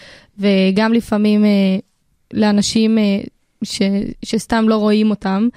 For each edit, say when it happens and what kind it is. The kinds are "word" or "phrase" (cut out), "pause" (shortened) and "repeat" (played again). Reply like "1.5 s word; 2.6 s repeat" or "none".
none